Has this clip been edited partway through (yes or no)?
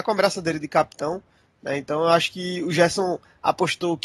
no